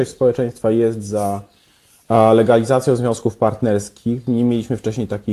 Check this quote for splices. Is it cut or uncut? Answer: uncut